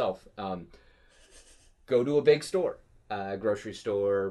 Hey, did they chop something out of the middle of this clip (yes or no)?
no